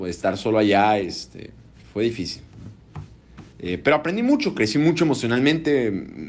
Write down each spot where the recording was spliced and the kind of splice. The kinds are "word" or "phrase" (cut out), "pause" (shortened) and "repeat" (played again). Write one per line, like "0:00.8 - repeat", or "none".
0:01.8 - pause
0:03.5 - pause